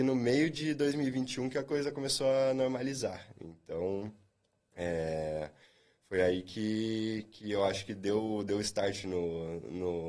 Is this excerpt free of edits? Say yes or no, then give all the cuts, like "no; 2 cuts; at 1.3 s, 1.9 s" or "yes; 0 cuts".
yes; 0 cuts